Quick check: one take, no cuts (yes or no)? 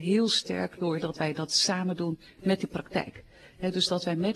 yes